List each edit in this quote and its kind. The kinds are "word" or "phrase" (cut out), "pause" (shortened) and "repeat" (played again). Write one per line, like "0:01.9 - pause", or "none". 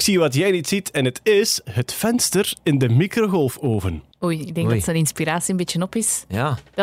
none